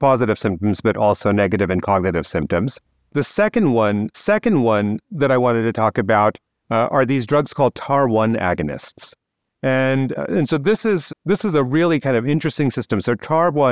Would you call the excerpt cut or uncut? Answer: cut